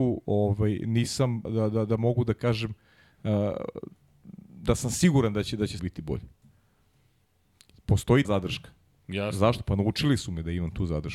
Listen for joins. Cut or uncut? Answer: cut